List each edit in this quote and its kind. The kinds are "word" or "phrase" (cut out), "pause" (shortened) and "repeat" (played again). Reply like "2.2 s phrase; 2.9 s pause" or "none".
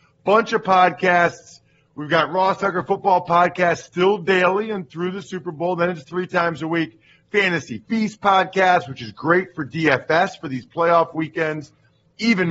none